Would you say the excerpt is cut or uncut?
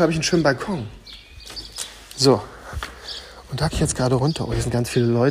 cut